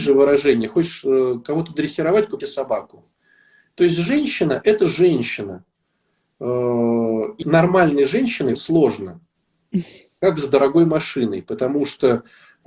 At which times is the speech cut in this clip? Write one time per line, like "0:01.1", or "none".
0:02.4
0:07.4
0:08.5